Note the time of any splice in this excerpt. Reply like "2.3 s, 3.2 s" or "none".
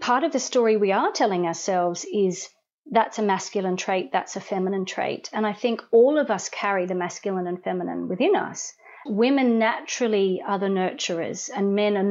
9.1 s